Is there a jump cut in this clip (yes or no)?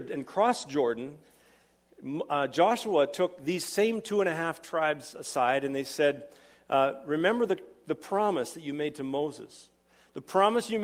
no